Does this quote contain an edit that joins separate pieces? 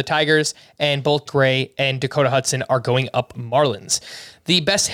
yes; 2 cuts; at 1.3 s, 3.3 s

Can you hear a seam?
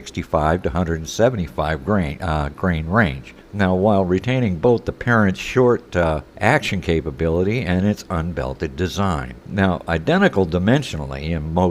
yes; 3 cuts; at 3.4 s, 6.3 s, 9.4 s

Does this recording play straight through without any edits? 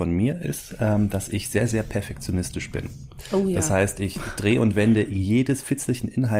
yes; 0 cuts

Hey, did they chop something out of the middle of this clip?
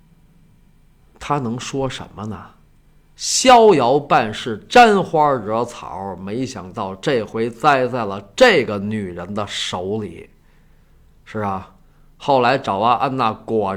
no; 0 cuts

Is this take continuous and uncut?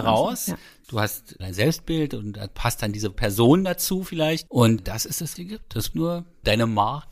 no; 5 cuts; at 1.4 s, 3.1 s, 4.8 s, 5.4 s, 5.9 s

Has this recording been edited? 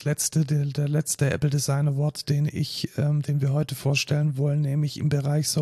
no; 0 cuts

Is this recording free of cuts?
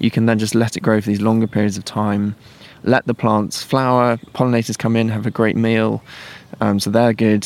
no; 1 cut; at 4.3 s

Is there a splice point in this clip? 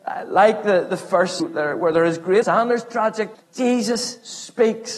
yes; 3 cuts; at 1.4 s, 2.4 s, 3.3 s

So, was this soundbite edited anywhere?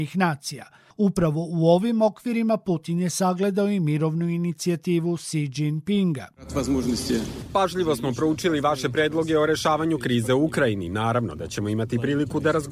no; 0 cuts

